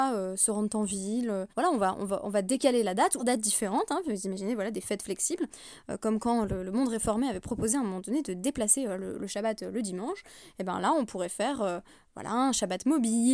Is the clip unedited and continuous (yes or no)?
no